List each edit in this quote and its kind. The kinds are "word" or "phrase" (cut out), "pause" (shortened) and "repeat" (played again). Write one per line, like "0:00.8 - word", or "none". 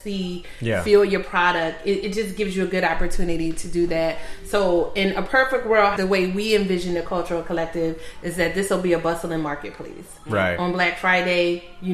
none